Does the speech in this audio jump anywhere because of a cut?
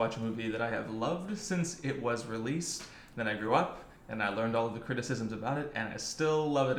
no; 0 cuts

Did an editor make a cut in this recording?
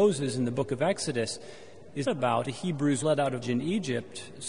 yes; 4 cuts; at 2.1 s, 2.4 s, 3.0 s, 3.4 s

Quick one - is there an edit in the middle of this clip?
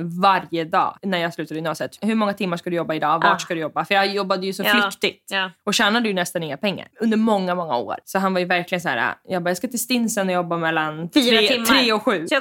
no; 0 cuts

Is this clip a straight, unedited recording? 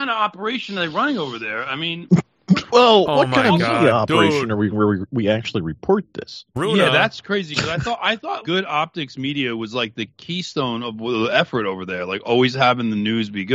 no; 2 cuts; at 4.7 s, 8.4 s

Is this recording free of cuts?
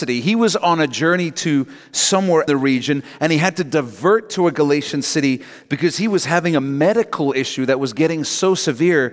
no; 1 cut; at 2.5 s

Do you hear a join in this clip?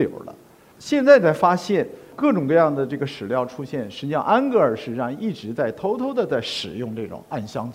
no; 0 cuts

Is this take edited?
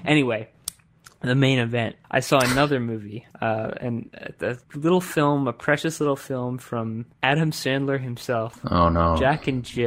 yes; 4 cuts; at 2.0 s, 3.3 s, 4.6 s, 7.1 s

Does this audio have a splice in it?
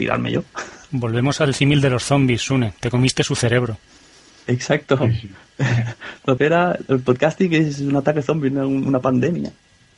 yes; 1 cut; at 6.4 s

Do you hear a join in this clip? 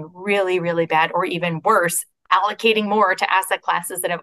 no; 0 cuts

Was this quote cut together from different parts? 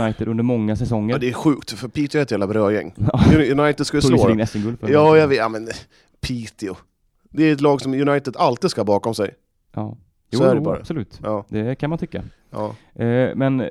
no; 0 cuts

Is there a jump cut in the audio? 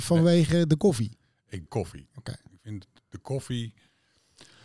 yes; 1 cut; at 1.7 s

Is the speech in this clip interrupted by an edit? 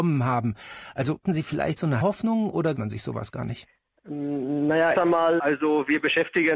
yes; 5 cuts; at 1.2 s, 2.0 s, 2.8 s, 4.9 s, 5.4 s

